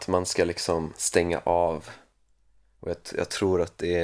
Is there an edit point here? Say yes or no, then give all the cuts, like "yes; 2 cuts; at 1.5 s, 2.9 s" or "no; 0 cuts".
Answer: no; 0 cuts